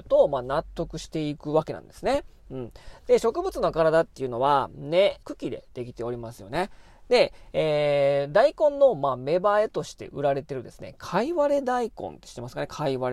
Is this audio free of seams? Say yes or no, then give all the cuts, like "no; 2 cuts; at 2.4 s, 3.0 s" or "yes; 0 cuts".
no; 1 cut; at 5.2 s